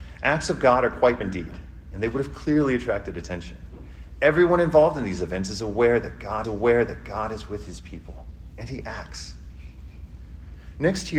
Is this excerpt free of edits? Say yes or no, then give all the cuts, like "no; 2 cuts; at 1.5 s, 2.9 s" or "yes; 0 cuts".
no; 2 cuts; at 1.2 s, 6.4 s